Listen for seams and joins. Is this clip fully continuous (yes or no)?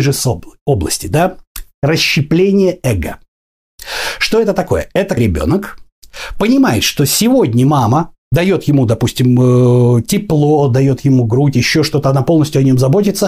no